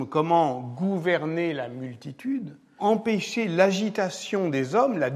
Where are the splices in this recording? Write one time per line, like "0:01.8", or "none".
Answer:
0:02.8